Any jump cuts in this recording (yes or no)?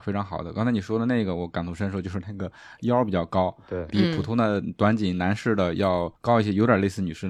yes